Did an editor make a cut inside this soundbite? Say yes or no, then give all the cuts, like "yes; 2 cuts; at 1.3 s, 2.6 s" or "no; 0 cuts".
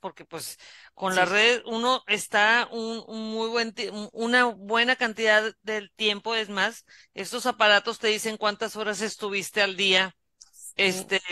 no; 0 cuts